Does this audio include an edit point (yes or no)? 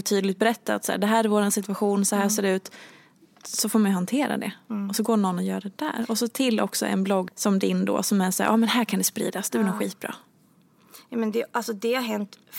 yes